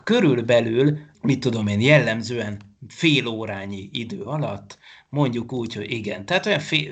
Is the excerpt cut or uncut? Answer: uncut